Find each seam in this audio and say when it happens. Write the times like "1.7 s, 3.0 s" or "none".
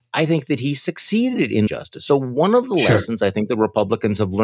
1.7 s

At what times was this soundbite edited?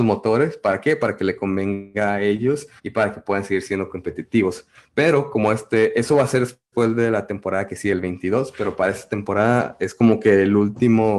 2.8 s

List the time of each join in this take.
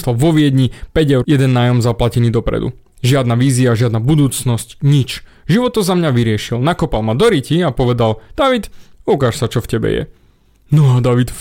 1.2 s, 8.9 s

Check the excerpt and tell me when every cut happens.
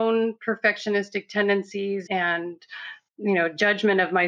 2.1 s, 3.1 s

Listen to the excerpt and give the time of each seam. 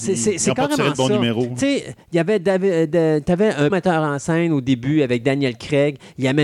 3.7 s

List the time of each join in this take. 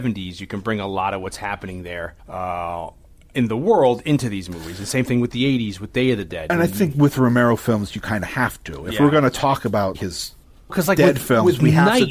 2.2 s, 9.9 s, 10.7 s

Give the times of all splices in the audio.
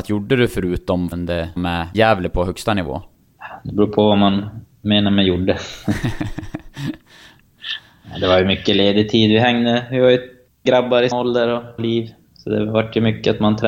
1.1 s, 1.6 s, 1.9 s, 10.7 s, 11.1 s, 11.8 s

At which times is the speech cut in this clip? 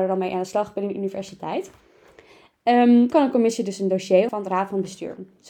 3.1 s, 4.3 s

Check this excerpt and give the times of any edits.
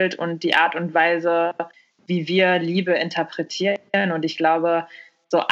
1.7 s

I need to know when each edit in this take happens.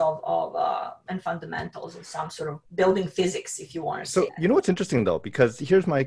2.7 s, 4.3 s

